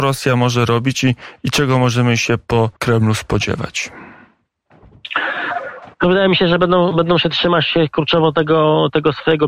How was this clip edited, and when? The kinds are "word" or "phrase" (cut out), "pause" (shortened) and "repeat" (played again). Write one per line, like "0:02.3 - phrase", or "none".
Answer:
0:02.8 - pause
0:05.9 - pause